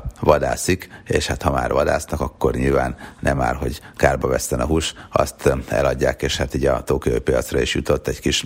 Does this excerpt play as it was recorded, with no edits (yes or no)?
yes